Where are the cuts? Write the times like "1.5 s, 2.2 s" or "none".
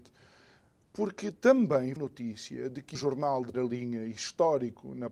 2.0 s, 2.9 s, 3.5 s